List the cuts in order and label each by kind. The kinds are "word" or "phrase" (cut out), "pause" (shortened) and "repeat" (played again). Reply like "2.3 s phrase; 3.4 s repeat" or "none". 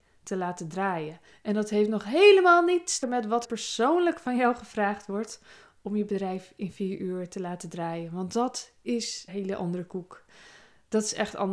1.3 s pause; 3.0 s word; 3.4 s word; 9.3 s word